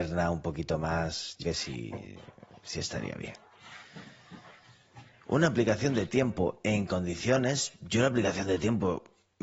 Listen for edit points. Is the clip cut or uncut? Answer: cut